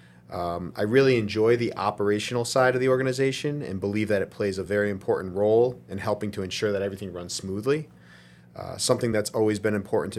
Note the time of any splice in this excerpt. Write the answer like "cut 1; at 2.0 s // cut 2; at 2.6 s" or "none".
none